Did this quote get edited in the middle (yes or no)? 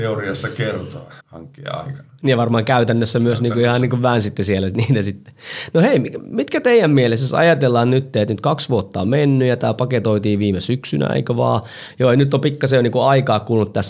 yes